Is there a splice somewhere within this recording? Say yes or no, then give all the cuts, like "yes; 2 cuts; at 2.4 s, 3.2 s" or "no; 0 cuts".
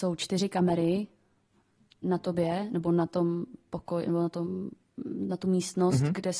no; 0 cuts